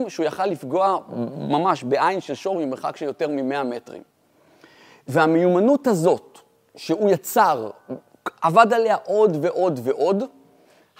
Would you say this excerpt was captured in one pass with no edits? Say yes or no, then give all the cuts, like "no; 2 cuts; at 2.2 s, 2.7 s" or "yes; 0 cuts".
yes; 0 cuts